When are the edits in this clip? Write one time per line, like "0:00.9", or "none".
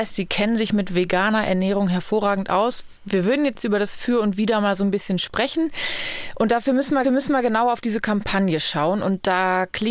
0:07.0